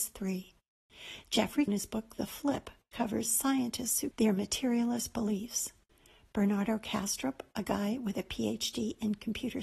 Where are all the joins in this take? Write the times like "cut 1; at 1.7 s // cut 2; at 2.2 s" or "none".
cut 1; at 1.7 s // cut 2; at 2.9 s // cut 3; at 4.1 s